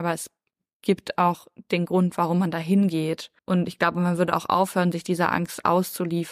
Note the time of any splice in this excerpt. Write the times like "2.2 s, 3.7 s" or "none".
3.4 s

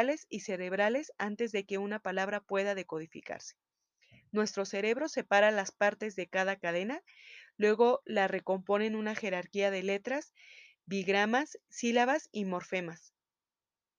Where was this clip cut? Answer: none

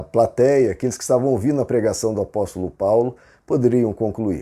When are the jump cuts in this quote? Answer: none

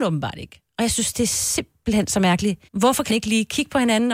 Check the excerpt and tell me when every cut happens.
2.7 s, 3.1 s

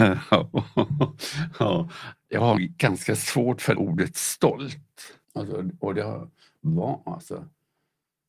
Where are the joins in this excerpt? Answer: 2.1 s, 2.6 s, 3.7 s, 5.2 s

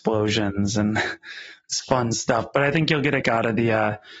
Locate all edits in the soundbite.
3.2 s

